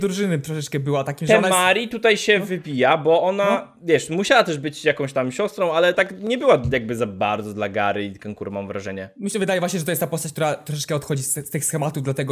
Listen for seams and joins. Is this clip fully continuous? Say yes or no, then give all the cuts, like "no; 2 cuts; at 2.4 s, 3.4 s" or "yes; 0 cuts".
yes; 0 cuts